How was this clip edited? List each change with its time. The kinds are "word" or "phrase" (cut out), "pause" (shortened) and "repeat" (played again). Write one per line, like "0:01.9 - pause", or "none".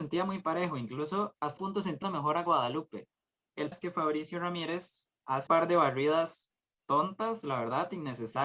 0:01.6 - word
0:02.0 - word
0:03.7 - word
0:05.5 - word